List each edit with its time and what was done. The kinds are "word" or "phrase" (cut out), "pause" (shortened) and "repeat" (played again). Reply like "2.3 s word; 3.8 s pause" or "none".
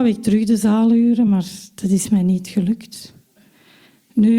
none